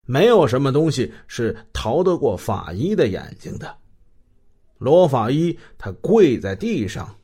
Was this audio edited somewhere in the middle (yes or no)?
no